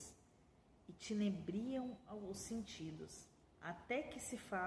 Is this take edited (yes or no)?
yes